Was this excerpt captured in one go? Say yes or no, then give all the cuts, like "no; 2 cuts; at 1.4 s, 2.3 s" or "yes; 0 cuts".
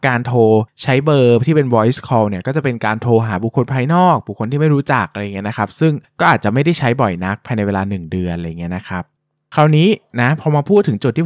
no; 1 cut; at 9.2 s